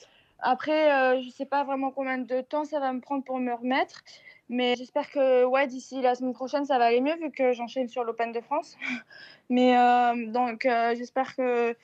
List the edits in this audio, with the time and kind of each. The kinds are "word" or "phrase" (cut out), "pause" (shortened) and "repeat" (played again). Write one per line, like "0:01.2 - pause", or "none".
0:04.7 - word